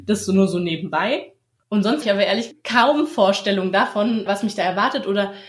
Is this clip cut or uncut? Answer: cut